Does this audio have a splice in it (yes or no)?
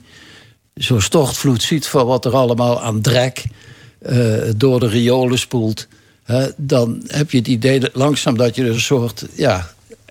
no